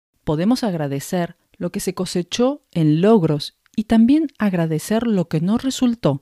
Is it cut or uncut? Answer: uncut